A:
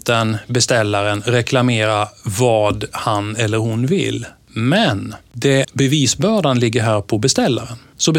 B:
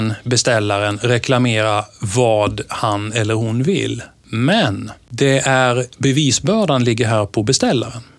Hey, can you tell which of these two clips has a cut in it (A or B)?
A